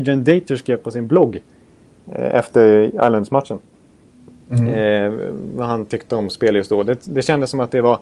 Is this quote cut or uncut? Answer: uncut